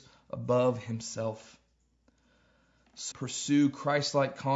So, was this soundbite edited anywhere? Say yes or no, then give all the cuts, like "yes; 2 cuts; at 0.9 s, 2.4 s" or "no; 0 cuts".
yes; 1 cut; at 3.1 s